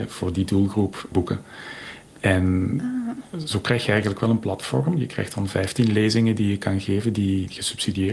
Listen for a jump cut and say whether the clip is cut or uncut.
cut